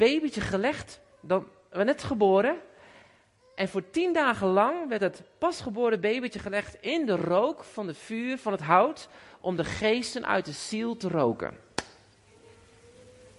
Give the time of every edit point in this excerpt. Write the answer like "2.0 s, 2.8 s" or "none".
none